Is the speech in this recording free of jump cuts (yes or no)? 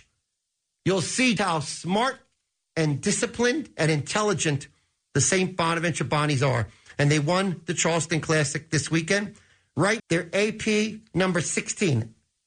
no